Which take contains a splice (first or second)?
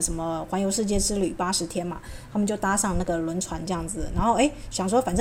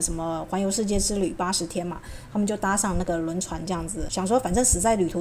second